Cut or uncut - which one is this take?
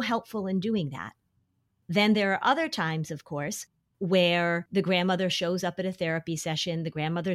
uncut